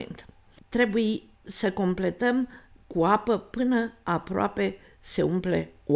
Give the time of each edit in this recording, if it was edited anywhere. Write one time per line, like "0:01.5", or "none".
none